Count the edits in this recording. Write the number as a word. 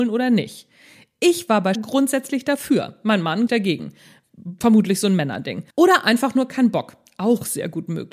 three